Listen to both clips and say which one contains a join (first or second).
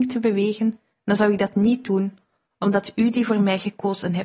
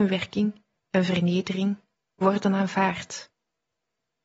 second